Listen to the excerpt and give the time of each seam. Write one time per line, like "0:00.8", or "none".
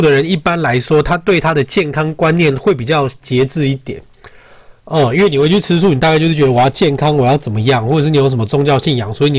0:04.8

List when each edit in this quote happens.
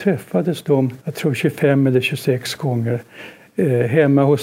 0:01.0

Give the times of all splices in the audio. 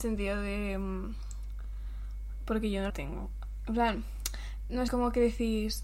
0:02.9
0:04.9

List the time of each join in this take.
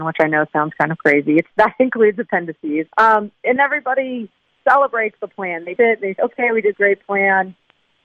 0:01.5
0:02.9
0:03.6
0:05.8
0:06.2
0:06.7

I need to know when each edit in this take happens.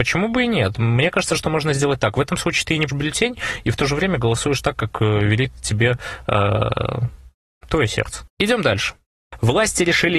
0:02.9

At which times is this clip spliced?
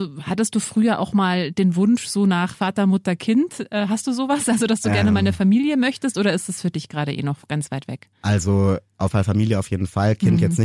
0:02.5
0:09.1

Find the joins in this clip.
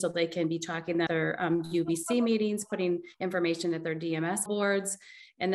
0:01.1
0:03.1
0:04.5

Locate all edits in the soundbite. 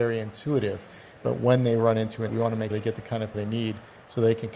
0:02.3
0:02.7
0:03.3

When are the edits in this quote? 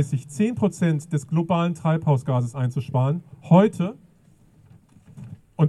none

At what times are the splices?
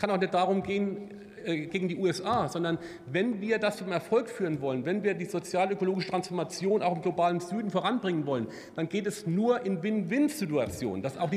none

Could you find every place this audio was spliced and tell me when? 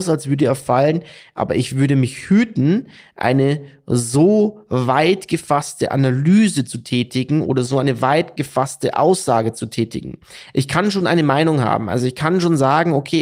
none

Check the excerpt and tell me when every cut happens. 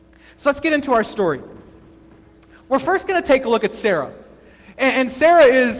none

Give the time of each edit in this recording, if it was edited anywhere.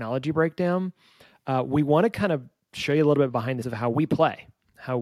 0:03.6

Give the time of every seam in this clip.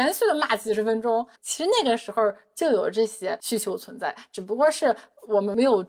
0:01.4

